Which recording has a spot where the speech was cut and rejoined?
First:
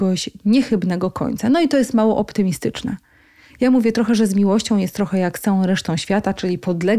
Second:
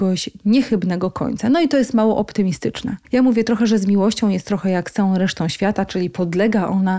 second; 1 cut; at 3.0 s

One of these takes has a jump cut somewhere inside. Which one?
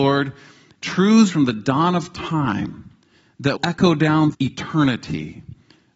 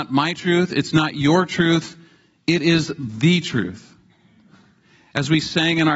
first; 3 cuts; at 1.3 s, 3.6 s, 4.3 s

